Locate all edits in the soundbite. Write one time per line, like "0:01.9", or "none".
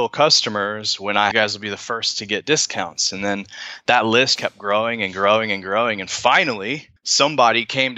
0:01.3
0:04.3
0:07.0